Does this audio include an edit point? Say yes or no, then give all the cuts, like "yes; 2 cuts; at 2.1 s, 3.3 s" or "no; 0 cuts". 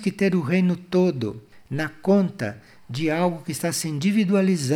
no; 0 cuts